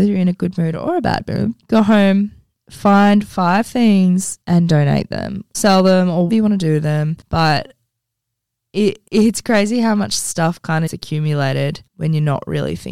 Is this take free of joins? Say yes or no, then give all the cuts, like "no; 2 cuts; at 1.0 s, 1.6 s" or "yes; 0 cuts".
no; 8 cuts; at 1.6 s, 4.4 s, 5.5 s, 6.3 s, 7.2 s, 9.1 s, 10.9 s, 11.9 s